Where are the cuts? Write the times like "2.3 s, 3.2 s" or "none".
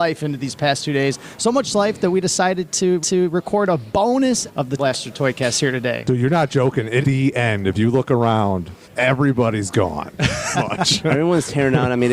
3.0 s, 4.5 s, 4.8 s, 7.0 s, 8.8 s, 10.5 s